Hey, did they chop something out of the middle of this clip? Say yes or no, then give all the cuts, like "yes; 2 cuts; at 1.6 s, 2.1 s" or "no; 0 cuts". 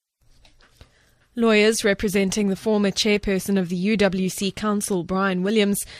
no; 0 cuts